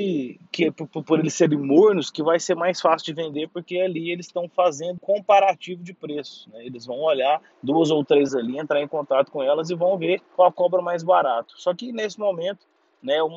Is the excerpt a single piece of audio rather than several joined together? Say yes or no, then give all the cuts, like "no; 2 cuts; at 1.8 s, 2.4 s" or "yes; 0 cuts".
no; 4 cuts; at 5.0 s, 7.5 s, 8.3 s, 10.3 s